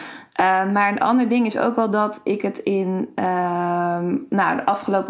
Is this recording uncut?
yes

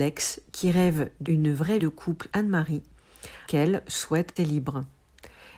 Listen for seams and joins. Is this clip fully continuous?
no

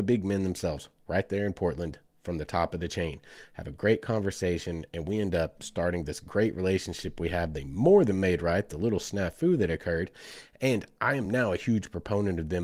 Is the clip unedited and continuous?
yes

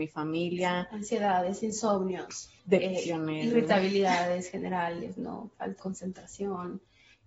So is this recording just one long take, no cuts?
no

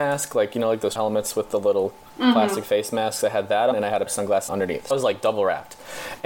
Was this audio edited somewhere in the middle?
yes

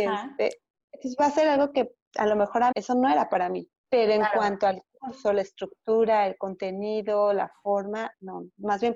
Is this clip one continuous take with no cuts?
no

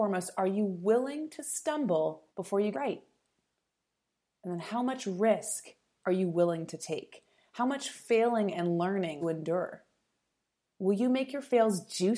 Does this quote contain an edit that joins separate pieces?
yes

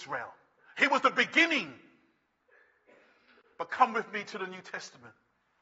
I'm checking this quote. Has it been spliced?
no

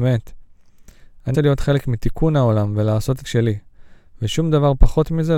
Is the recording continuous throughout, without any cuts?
no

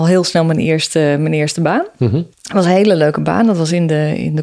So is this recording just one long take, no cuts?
no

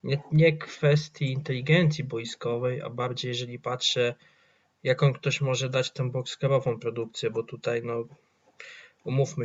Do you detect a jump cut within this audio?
no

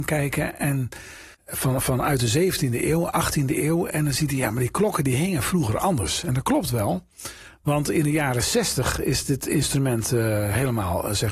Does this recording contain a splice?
yes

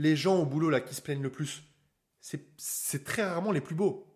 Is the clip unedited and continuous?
yes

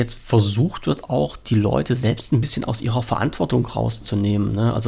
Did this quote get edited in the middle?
no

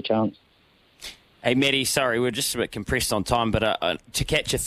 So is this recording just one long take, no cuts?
yes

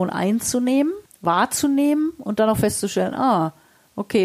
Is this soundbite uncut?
no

